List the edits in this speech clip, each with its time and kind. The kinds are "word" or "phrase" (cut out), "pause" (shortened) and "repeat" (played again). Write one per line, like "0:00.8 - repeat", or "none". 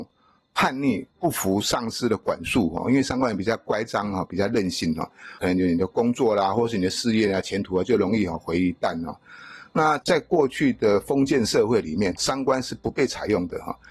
0:01.1 - pause
0:12.2 - word

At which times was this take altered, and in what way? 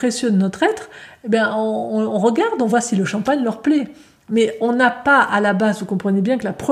none

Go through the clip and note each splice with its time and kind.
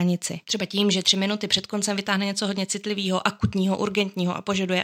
none

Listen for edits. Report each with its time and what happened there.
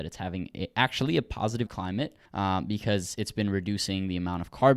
0:01.7 - phrase
0:02.3 - pause

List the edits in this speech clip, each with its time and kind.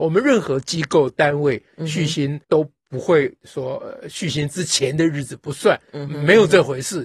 0:02.4 - pause

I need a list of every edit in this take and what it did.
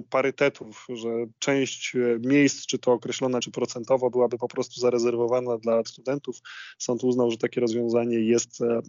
0:03.4 - word
0:05.8 - word

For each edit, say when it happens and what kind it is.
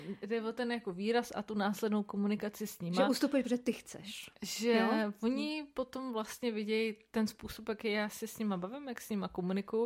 none

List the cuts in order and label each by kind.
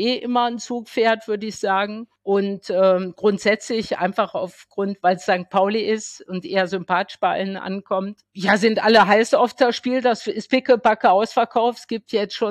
none

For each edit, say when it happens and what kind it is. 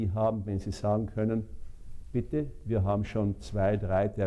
none

